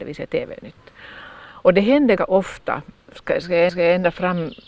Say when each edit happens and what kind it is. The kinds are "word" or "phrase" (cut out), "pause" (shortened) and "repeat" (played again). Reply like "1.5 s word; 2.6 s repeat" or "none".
2.2 s word; 3.0 s pause; 3.7 s repeat